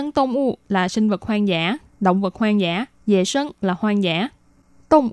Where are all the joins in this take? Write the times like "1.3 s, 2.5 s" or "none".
none